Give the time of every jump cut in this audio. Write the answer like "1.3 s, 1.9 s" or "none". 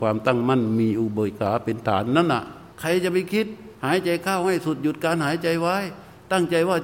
2.7 s, 3.7 s